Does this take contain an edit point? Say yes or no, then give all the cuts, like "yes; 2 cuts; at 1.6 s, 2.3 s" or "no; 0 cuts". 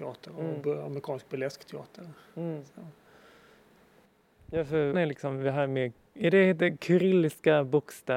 yes; 1 cut; at 4.9 s